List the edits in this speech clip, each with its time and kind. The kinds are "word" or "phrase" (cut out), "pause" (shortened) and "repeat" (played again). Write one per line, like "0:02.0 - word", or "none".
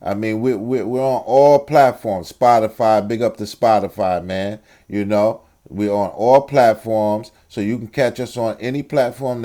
none